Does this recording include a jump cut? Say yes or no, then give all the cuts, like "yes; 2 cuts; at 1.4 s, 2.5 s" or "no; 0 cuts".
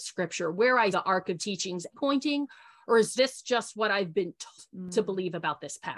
yes; 5 cuts; at 0.9 s, 1.4 s, 1.9 s, 3.2 s, 4.6 s